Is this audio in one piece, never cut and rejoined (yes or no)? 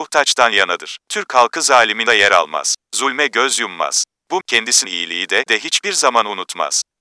no